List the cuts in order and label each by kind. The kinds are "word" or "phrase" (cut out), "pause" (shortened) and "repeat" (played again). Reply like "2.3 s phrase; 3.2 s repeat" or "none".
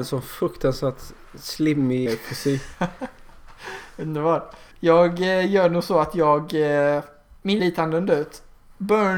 2.1 s word; 4.7 s pause; 7.6 s phrase